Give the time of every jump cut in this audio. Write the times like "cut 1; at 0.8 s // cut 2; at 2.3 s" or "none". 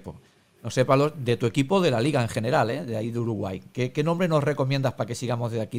none